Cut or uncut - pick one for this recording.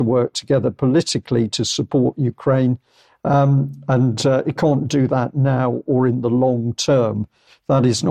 uncut